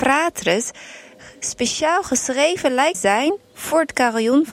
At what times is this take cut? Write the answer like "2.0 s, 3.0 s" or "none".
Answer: 2.9 s